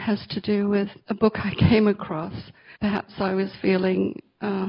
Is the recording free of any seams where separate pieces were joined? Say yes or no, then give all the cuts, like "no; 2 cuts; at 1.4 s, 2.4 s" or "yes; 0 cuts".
no; 1 cut; at 2.8 s